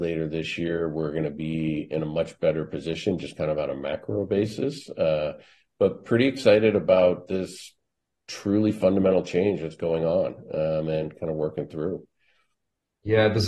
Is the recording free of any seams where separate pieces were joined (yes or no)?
yes